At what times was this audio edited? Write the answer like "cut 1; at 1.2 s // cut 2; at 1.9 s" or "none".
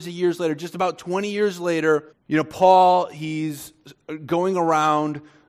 cut 1; at 2.1 s